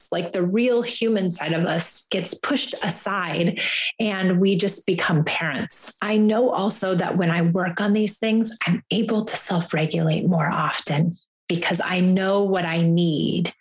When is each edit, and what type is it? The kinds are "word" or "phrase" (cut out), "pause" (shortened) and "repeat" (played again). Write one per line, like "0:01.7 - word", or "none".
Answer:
none